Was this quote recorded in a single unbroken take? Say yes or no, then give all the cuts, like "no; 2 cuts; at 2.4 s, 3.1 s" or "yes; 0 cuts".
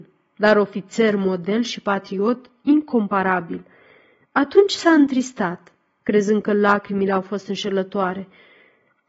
yes; 0 cuts